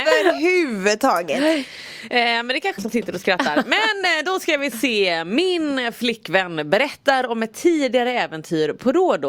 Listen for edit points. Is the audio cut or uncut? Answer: cut